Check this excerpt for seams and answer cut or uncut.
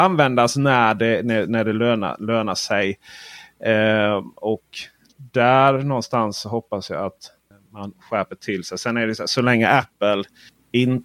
uncut